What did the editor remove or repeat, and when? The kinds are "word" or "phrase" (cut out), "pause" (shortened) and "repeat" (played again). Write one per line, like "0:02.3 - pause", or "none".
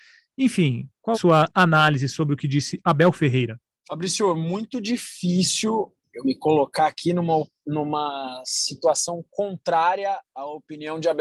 0:01.1 - word